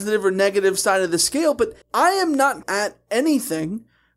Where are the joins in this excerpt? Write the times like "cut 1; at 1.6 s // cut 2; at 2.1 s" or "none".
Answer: cut 1; at 1.8 s // cut 2; at 2.6 s